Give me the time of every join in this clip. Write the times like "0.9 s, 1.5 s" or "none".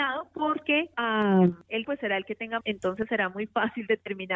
0.9 s, 1.8 s, 2.6 s